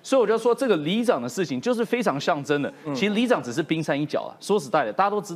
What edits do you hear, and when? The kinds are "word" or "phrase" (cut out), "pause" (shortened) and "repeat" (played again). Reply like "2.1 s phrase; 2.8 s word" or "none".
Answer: none